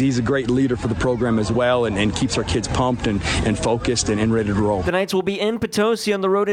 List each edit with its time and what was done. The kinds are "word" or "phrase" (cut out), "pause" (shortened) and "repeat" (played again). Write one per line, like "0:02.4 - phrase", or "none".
none